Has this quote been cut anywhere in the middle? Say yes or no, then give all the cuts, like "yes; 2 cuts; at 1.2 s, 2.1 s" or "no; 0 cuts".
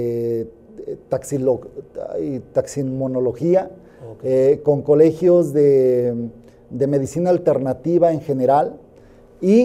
no; 0 cuts